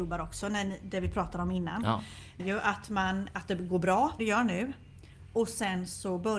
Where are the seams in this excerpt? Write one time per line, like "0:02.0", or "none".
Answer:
0:02.4
0:04.2